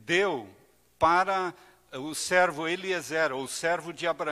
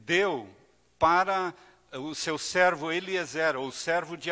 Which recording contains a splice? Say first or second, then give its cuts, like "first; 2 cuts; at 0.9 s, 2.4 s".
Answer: first; 1 cut; at 2.1 s